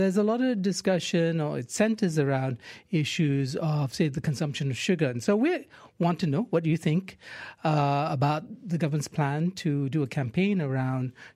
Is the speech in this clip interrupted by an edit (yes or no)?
no